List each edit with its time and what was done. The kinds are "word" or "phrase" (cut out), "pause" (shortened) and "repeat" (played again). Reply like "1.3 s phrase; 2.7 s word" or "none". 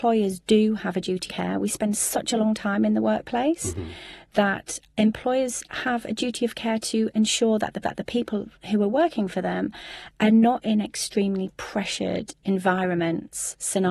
1.3 s word; 4.9 s pause; 7.8 s repeat